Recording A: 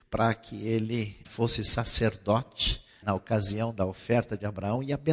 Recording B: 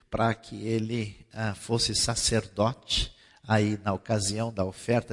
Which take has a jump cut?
A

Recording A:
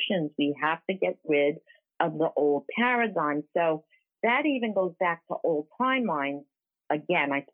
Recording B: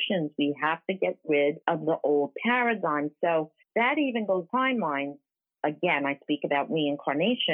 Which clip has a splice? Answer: B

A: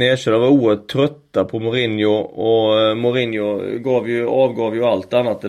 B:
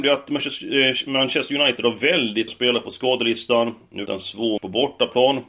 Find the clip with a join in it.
B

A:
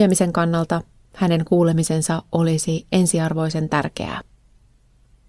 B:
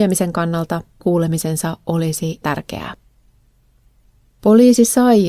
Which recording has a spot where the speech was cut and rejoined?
B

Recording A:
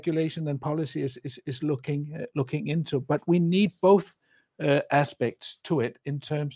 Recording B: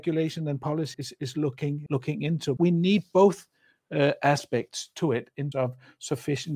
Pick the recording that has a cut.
B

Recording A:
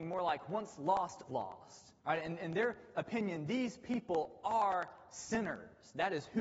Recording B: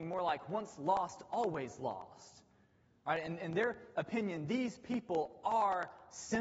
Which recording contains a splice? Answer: A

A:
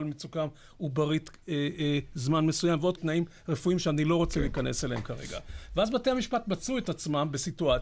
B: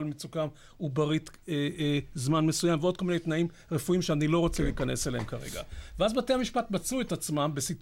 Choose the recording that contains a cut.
A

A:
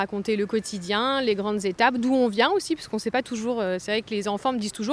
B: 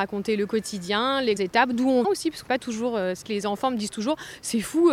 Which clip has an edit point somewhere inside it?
B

